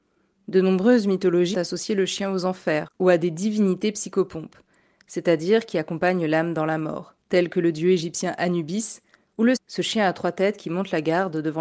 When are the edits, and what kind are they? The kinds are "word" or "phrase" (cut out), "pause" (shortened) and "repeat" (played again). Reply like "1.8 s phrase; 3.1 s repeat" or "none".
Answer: 1.5 s word; 7.2 s pause; 9.6 s word